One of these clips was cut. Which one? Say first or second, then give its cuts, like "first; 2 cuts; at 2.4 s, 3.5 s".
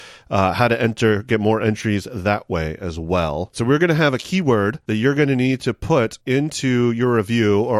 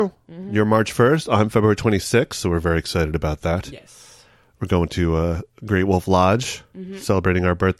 first; 1 cut; at 6.2 s